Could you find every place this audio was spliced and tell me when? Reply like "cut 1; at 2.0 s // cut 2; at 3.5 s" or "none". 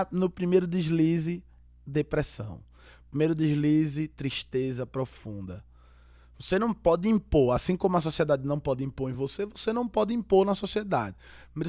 none